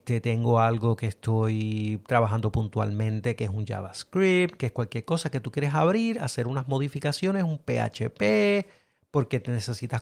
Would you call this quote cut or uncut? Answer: uncut